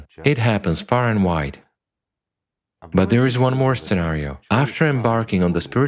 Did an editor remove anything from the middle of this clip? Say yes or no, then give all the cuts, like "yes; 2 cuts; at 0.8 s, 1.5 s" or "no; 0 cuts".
no; 0 cuts